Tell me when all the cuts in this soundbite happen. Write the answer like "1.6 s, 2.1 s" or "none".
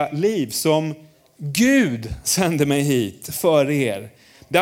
none